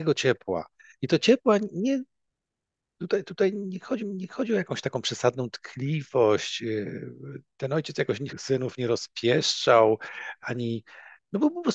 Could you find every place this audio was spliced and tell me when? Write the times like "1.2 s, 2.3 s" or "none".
4.0 s, 8.3 s